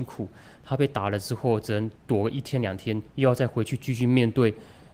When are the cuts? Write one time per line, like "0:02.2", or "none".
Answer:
0:02.0
0:03.1